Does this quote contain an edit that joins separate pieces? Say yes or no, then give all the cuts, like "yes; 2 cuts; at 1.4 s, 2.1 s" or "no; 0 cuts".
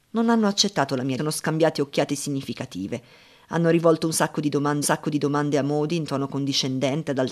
yes; 2 cuts; at 1.2 s, 4.8 s